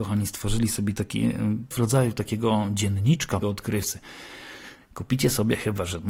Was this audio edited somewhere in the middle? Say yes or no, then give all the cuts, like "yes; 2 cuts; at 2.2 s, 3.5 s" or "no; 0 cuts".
yes; 2 cuts; at 1.7 s, 3.4 s